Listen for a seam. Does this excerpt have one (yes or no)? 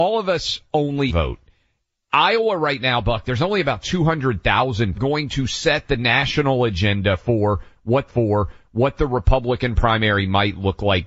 yes